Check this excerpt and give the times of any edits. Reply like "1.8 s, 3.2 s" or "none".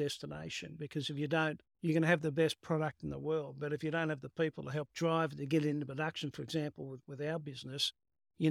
1.7 s